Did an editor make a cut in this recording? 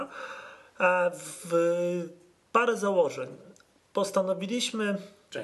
no; 0 cuts

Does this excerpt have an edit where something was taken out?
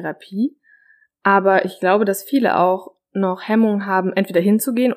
no; 0 cuts

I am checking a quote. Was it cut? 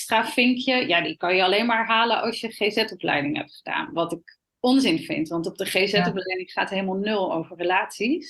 yes; 1 cut; at 4.5 s

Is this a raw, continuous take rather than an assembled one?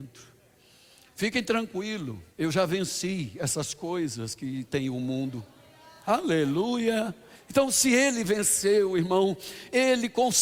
no; 2 cuts; at 2.3 s, 7.3 s

